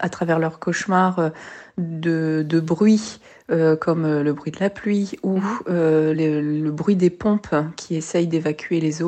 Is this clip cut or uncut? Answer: uncut